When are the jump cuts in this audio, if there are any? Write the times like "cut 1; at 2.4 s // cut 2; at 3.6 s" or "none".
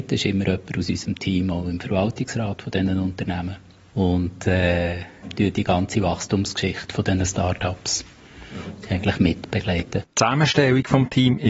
cut 1; at 10.1 s